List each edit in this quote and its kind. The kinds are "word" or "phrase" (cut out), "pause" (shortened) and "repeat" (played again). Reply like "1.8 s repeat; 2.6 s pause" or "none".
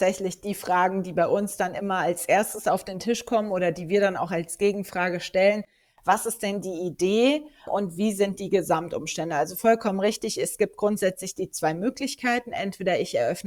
7.7 s word